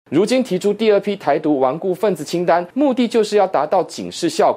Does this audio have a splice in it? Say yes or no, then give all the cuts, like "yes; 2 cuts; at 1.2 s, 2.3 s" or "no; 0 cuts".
no; 0 cuts